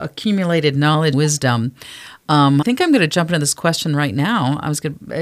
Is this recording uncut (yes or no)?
no